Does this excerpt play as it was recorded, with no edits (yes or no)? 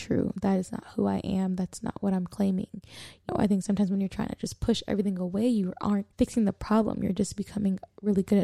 no